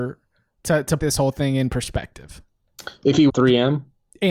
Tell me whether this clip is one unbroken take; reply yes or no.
no